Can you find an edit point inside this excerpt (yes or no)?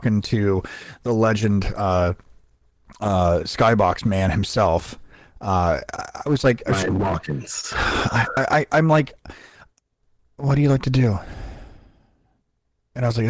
no